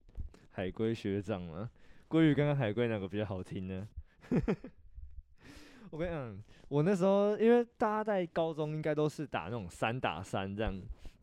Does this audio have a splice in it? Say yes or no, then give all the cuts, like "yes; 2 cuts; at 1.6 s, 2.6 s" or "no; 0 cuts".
no; 0 cuts